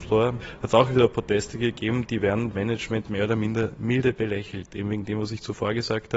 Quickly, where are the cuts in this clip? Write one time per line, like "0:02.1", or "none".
0:02.5

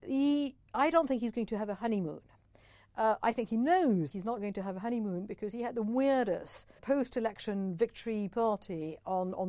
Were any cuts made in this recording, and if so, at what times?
0:04.1
0:06.8

